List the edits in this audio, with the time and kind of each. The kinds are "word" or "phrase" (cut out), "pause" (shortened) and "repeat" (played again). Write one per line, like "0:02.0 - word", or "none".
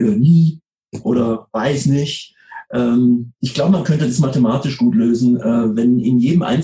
0:03.4 - pause